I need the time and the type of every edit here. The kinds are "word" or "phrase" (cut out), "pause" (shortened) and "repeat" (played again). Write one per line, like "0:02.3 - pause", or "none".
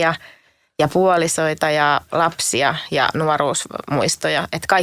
none